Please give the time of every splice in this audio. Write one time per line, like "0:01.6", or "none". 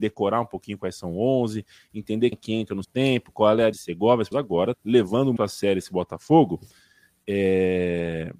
0:02.3
0:02.8
0:03.7
0:04.3
0:04.7
0:05.4